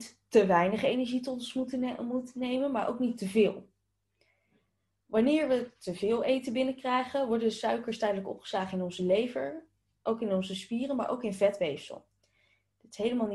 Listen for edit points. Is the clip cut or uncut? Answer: uncut